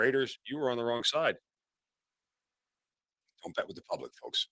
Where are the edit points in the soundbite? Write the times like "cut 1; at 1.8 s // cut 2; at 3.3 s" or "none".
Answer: none